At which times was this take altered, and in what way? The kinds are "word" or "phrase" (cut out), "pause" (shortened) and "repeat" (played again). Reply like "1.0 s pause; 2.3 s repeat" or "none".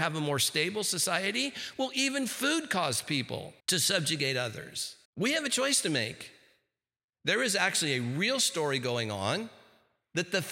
3.6 s pause; 5.0 s pause